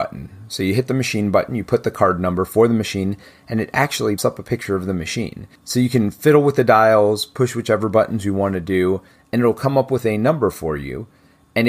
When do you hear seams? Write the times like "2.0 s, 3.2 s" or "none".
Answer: 4.2 s